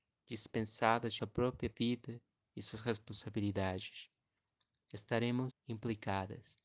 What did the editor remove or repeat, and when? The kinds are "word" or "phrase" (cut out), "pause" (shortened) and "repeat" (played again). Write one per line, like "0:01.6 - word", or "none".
0:01.2 - word
0:05.5 - word